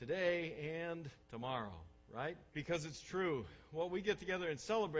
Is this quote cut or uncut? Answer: cut